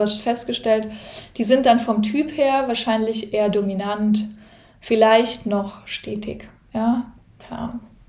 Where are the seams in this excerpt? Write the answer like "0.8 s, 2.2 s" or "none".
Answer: none